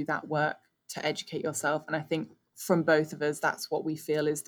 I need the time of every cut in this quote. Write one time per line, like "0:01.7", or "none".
none